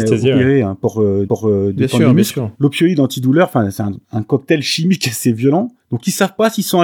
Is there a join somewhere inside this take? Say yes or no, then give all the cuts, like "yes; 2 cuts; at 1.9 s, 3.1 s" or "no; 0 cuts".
yes; 4 cuts; at 1.3 s, 2.5 s, 4.0 s, 5.8 s